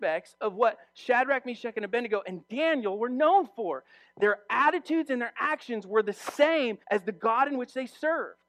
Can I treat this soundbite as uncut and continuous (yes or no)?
no